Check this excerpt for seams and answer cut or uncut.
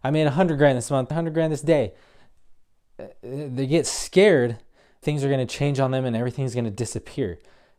cut